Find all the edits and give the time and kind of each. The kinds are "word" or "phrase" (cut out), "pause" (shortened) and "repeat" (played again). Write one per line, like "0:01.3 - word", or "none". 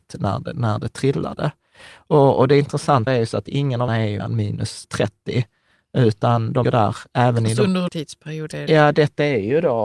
0:03.1 - word
0:03.9 - word
0:04.2 - word
0:04.8 - word
0:06.6 - word
0:07.9 - word